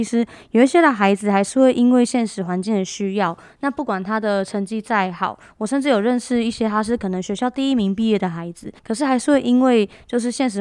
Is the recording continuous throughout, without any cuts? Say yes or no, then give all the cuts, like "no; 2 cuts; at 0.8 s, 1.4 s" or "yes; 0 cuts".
no; 1 cut; at 8.8 s